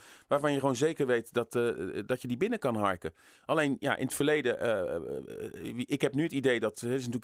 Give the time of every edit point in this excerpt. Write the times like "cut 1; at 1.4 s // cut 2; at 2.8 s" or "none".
none